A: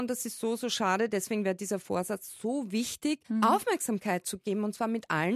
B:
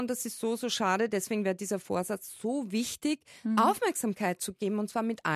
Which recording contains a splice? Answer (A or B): A